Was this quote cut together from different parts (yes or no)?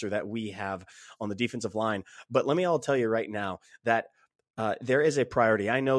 no